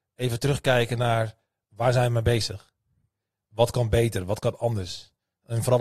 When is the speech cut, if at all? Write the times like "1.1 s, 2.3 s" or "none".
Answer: none